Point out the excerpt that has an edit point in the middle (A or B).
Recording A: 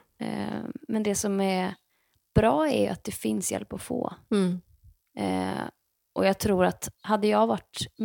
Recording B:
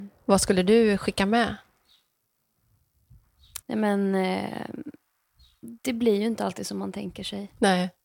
B